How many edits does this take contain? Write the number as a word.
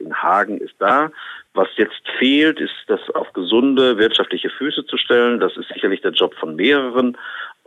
one